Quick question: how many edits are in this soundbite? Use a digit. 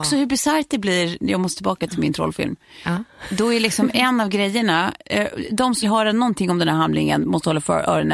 1